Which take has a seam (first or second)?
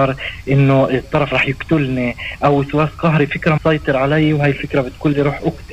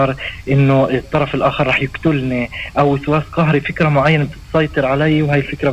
first